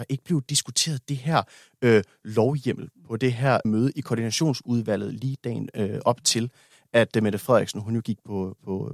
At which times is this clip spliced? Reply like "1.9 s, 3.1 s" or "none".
none